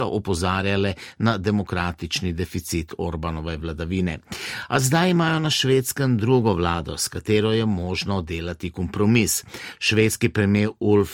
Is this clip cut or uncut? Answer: uncut